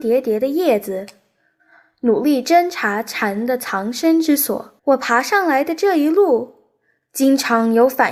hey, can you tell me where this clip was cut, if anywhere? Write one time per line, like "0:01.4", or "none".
0:04.8